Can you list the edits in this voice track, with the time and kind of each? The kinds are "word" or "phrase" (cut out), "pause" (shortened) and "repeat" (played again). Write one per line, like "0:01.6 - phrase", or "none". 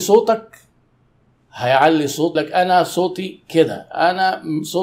0:02.4 - word